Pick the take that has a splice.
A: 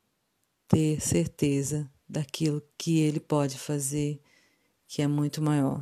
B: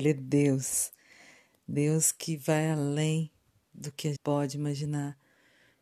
B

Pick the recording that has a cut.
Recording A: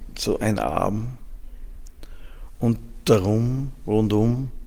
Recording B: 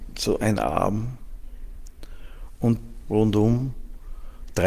B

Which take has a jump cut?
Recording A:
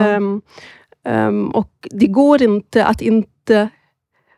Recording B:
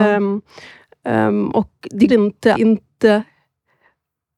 B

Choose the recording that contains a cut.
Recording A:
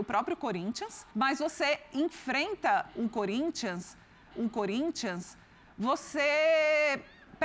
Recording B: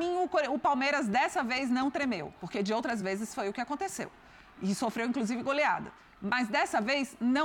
A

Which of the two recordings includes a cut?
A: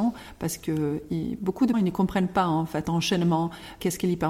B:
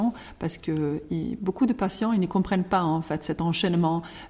A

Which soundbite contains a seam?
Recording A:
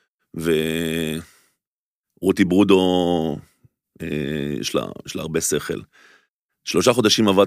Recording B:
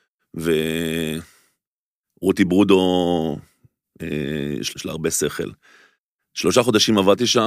B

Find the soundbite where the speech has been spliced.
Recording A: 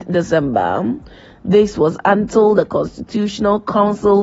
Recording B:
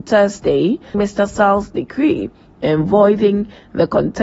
B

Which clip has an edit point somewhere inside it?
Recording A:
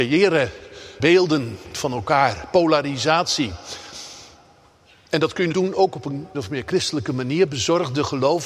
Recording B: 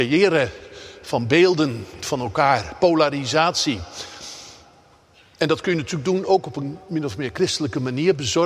A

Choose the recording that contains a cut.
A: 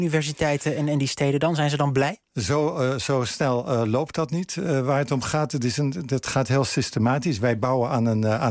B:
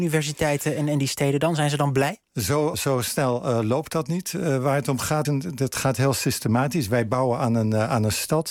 B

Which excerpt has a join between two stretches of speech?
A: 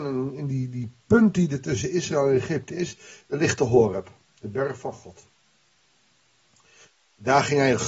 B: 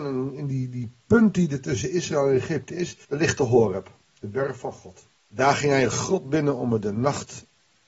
B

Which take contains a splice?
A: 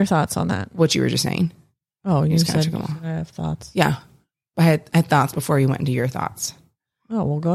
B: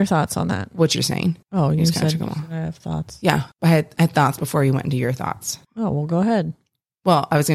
B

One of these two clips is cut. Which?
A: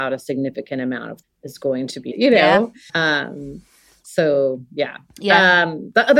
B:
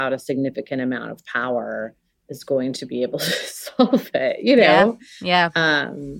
A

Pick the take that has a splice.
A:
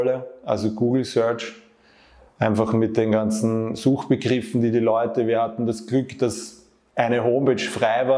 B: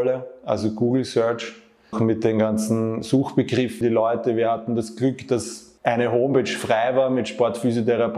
B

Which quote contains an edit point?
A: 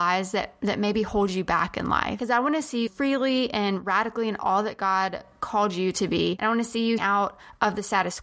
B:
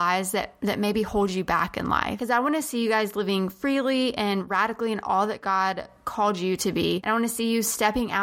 A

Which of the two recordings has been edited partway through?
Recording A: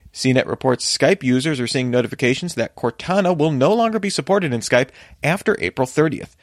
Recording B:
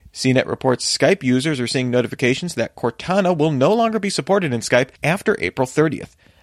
B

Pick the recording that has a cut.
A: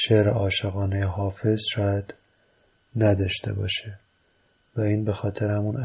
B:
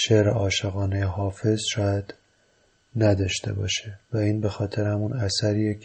B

